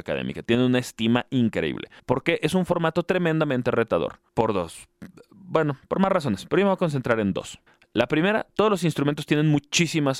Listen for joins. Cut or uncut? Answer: cut